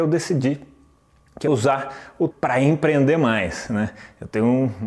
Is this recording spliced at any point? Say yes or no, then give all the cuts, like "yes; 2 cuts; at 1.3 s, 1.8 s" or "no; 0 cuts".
yes; 2 cuts; at 1.5 s, 2.3 s